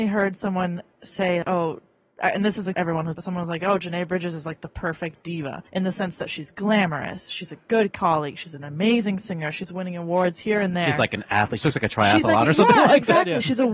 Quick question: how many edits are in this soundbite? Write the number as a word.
four